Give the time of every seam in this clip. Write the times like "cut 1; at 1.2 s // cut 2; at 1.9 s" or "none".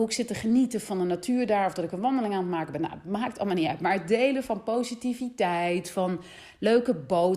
none